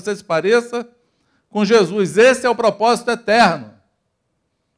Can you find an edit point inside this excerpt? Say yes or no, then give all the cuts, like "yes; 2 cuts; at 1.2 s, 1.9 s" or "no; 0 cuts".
no; 0 cuts